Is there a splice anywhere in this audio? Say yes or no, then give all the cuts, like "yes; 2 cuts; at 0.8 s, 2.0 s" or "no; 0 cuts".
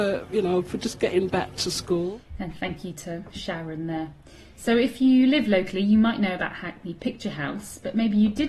no; 0 cuts